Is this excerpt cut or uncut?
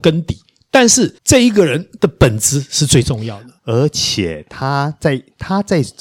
cut